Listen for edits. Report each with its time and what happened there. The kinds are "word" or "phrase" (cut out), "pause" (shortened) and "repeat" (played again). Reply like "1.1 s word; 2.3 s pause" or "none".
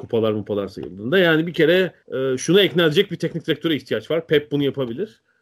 2.0 s pause

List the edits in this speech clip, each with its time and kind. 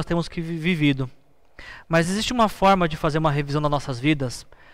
none

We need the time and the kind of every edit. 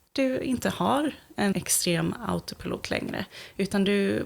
1.5 s word

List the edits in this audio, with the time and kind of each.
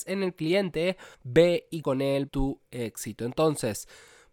1.1 s pause; 1.8 s word; 2.3 s phrase

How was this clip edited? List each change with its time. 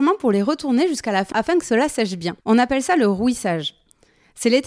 1.3 s phrase; 2.4 s pause

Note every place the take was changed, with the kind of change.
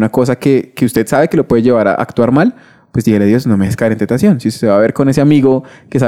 none

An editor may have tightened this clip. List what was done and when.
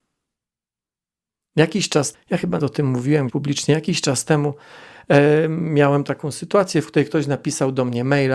2.1 s word; 2.6 s word; 3.3 s word

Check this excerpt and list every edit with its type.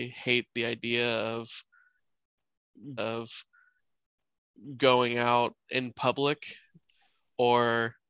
3.0 s repeat

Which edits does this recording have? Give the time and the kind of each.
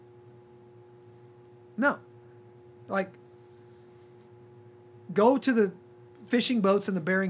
none

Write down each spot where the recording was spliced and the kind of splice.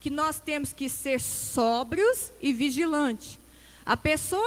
none

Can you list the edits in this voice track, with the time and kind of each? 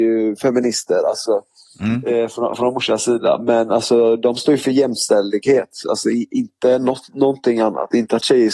none

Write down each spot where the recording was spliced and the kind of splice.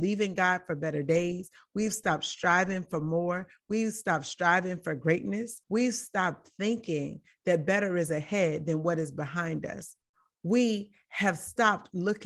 5.6 s pause; 10.1 s pause

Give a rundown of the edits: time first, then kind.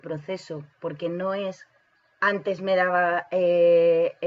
1.8 s pause

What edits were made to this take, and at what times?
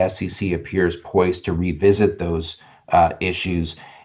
none

